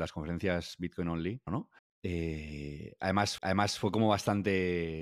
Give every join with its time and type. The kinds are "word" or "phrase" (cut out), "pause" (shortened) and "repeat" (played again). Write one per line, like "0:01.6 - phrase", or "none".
0:01.5 - phrase
0:01.8 - pause
0:03.4 - repeat